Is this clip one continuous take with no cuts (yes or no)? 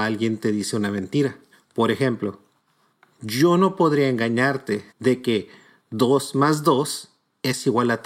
no